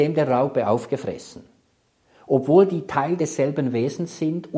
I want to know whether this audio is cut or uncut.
uncut